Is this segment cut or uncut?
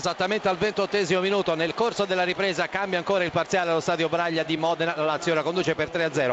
uncut